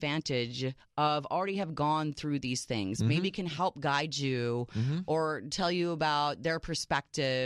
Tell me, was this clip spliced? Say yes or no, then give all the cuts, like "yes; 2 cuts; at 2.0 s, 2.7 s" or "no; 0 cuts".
no; 0 cuts